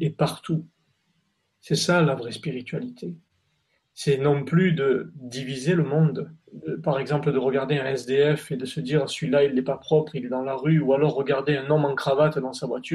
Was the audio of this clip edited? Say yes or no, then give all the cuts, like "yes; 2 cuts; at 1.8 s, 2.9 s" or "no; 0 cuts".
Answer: yes; 1 cut; at 6.4 s